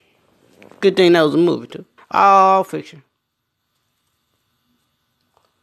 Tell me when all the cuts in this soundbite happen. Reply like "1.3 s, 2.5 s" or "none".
2.0 s